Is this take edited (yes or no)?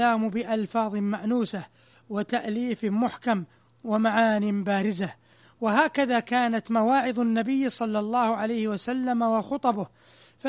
no